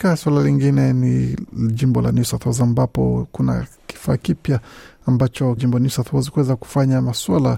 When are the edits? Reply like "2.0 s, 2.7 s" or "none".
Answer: 5.6 s